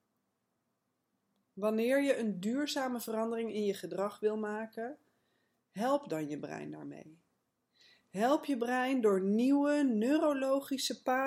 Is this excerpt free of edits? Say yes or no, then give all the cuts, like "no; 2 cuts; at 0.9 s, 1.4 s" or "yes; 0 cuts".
yes; 0 cuts